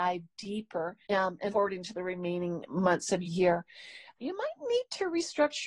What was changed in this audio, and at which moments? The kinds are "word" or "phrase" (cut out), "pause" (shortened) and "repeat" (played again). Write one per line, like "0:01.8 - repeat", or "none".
0:01.0 - pause
0:01.5 - word
0:03.3 - phrase
0:04.2 - word